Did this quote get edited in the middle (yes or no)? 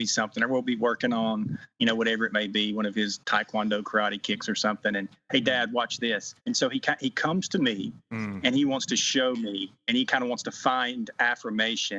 yes